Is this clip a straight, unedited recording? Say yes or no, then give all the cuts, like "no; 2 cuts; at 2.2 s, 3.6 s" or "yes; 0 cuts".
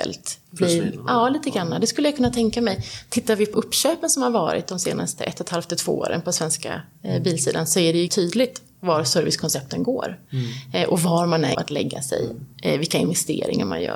no; 3 cuts; at 3.5 s, 8.1 s, 11.5 s